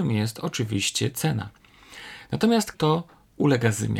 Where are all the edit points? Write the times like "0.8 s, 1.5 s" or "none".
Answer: 2.7 s